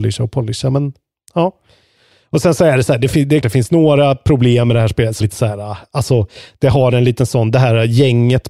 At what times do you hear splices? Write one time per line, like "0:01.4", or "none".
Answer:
0:03.4
0:05.2